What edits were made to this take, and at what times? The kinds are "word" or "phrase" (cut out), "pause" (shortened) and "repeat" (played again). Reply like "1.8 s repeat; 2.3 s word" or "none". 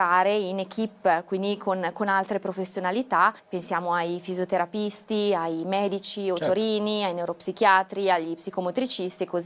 3.4 s pause